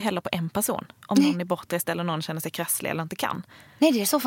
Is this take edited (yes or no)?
no